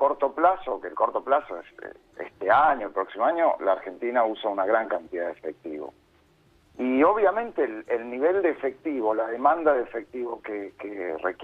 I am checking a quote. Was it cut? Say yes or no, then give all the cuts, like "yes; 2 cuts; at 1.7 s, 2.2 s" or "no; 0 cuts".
no; 0 cuts